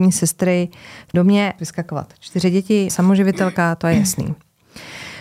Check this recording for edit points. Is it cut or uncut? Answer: cut